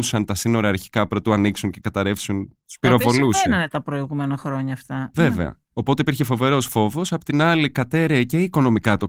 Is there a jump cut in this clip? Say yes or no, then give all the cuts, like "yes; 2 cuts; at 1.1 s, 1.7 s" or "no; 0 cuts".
no; 0 cuts